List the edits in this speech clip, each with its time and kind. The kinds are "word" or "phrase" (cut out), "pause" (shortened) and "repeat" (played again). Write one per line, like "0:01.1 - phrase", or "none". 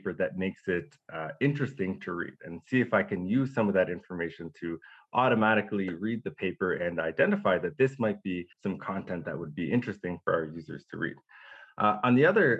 0:08.5 - pause

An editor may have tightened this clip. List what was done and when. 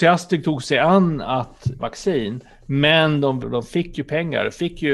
0:01.8 - word
0:03.4 - phrase

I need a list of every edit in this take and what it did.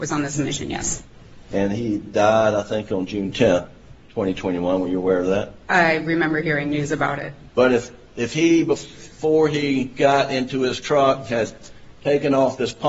0:05.6 - pause

